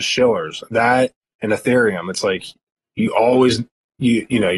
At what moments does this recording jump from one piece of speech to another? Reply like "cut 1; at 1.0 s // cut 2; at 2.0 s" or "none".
none